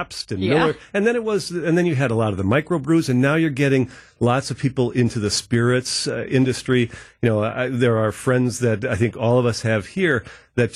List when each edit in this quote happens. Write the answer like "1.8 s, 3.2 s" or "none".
none